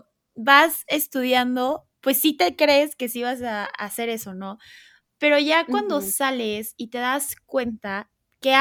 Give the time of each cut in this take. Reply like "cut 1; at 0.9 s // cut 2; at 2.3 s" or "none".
none